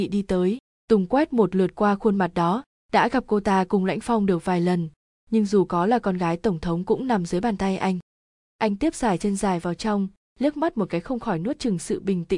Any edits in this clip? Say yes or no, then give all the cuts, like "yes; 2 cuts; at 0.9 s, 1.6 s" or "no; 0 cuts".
no; 0 cuts